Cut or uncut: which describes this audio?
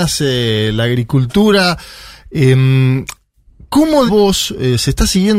cut